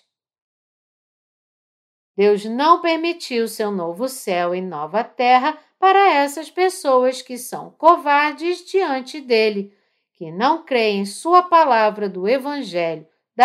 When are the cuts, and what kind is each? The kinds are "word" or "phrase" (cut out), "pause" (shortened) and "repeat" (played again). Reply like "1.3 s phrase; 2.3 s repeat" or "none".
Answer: none